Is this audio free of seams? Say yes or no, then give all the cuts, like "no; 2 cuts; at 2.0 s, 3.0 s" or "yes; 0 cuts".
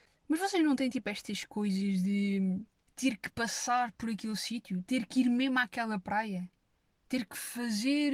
yes; 0 cuts